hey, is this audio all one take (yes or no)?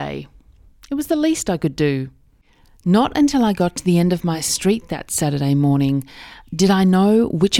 yes